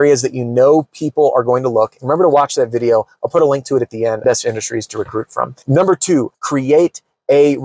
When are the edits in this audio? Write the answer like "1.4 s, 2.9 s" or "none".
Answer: 4.2 s, 5.6 s, 6.3 s